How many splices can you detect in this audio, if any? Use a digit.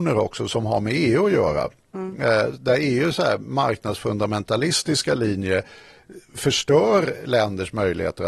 0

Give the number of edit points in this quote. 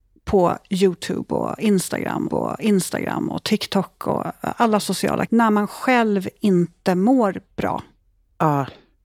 2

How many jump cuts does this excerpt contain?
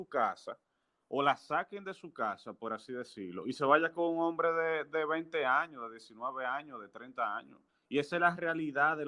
1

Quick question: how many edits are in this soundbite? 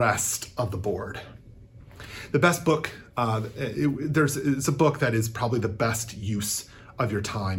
0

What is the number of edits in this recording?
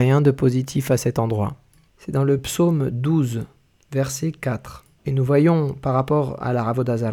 0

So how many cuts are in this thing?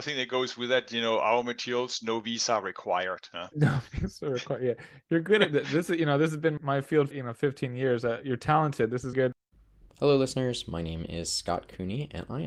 4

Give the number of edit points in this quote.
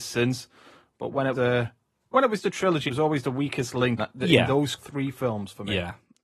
5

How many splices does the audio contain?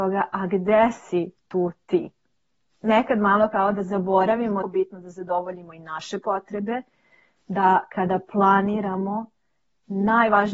1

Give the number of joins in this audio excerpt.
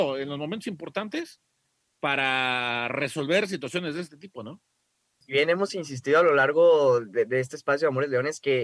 0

